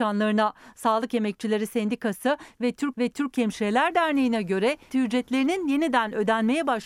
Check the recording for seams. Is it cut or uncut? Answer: cut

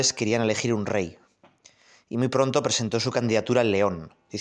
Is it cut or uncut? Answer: uncut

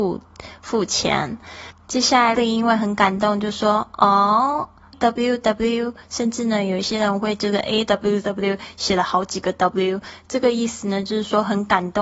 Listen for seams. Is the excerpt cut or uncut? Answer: cut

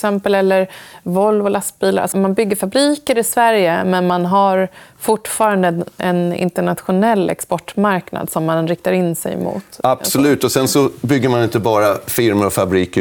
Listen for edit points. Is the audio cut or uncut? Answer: cut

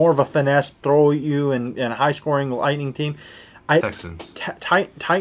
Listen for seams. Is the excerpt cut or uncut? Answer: cut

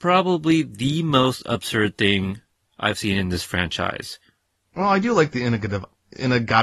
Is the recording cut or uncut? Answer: uncut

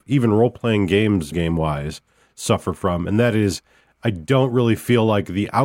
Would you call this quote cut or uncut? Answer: cut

